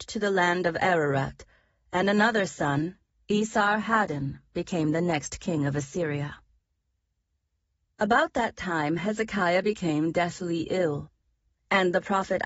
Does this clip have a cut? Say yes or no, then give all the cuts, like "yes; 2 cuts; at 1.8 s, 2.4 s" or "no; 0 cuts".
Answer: no; 0 cuts